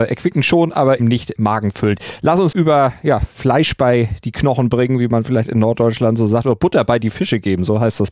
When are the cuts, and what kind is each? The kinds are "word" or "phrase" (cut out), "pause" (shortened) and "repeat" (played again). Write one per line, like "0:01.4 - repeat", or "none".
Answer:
0:01.0 - word
0:01.4 - word
0:02.5 - word